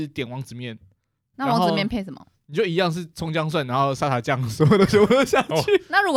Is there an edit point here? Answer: yes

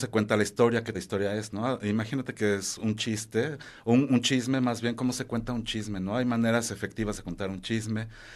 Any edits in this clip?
yes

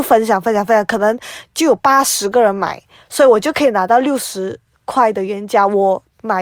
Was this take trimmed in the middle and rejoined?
no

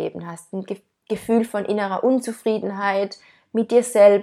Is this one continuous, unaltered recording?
yes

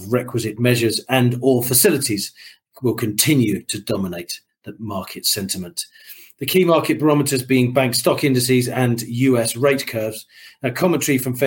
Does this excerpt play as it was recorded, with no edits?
yes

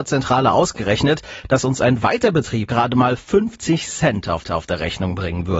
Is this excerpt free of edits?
no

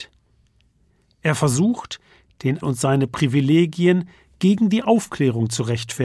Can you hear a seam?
yes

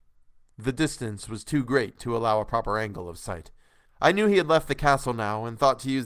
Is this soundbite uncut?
no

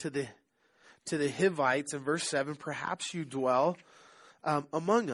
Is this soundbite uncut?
yes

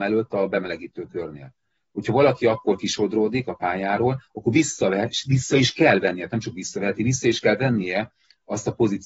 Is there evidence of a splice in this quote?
no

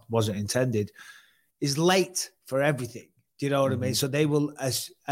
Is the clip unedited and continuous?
yes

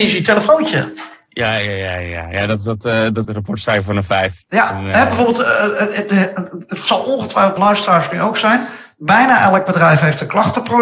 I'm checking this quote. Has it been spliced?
yes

